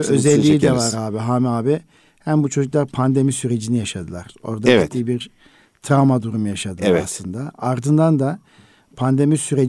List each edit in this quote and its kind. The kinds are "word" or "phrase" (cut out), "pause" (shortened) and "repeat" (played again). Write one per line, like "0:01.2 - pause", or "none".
none